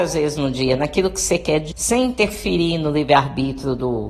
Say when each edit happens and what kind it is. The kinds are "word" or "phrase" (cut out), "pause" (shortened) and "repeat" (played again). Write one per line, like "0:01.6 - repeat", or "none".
0:01.7 - word